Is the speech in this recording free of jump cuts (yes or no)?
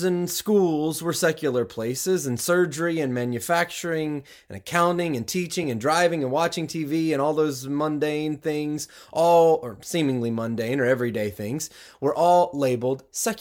yes